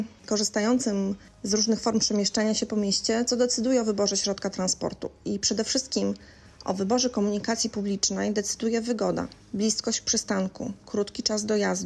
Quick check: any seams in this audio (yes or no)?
no